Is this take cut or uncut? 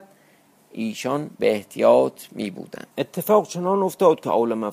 cut